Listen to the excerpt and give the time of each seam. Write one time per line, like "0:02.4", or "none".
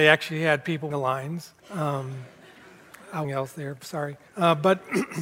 0:00.9
0:01.6
0:03.2
0:04.3